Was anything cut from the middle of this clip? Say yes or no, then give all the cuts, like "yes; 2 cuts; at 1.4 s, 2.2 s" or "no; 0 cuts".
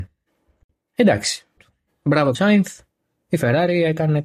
yes; 2 cuts; at 1.6 s, 2.3 s